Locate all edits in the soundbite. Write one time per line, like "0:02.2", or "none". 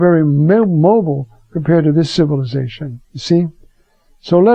0:03.0